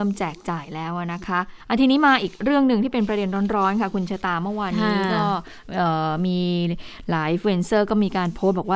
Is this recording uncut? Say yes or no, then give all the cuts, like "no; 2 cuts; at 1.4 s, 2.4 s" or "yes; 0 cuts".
no; 1 cut; at 1.6 s